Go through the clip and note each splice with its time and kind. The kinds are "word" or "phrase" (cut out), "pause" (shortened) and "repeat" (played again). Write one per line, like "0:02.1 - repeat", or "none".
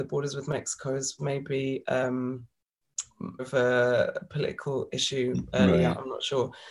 0:01.2 - word
0:03.4 - word